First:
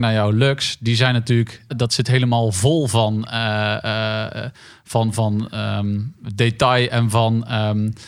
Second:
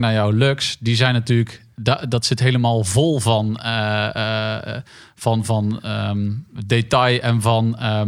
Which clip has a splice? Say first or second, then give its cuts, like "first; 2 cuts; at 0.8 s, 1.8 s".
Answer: first; 1 cut; at 1.7 s